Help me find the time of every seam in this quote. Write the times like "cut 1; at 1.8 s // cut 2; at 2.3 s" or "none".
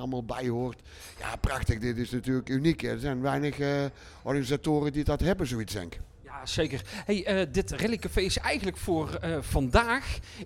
none